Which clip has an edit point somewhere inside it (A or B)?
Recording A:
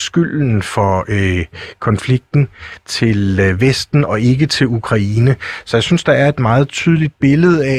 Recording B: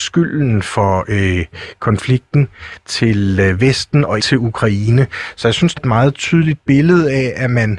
B